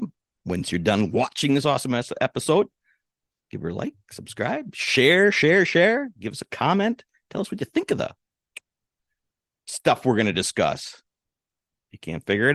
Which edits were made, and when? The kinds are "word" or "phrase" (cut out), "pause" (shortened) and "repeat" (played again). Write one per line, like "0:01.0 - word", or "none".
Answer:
none

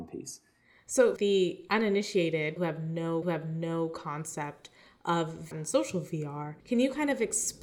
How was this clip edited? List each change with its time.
0:01.2 - word
0:02.6 - word
0:03.2 - repeat
0:05.5 - phrase
0:06.6 - pause

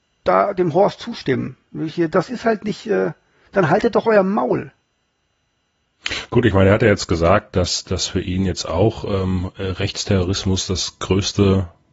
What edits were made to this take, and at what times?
none

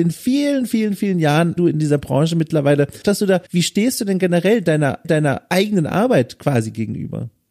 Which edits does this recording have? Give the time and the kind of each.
0:01.6 - phrase
0:03.0 - word
0:03.5 - pause
0:05.0 - repeat

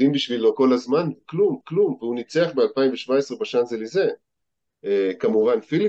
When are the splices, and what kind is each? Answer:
0:01.6 - repeat

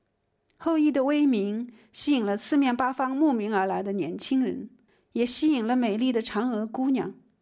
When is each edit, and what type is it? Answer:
none

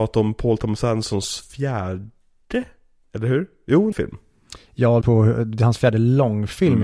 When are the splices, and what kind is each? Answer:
0:03.9 - phrase
0:05.0 - word

